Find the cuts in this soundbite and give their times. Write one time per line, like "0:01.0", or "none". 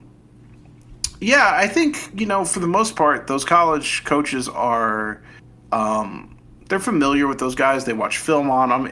0:05.4